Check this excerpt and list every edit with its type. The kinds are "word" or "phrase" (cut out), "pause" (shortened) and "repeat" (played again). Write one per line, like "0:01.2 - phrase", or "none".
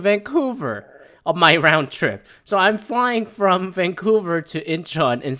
none